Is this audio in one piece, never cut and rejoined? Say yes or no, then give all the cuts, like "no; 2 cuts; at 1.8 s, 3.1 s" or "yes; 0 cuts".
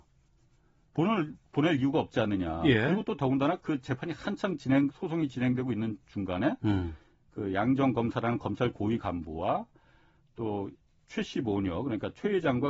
yes; 0 cuts